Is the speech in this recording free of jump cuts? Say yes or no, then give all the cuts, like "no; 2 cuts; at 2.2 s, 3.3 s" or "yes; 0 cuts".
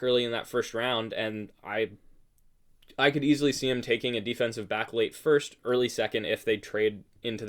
yes; 0 cuts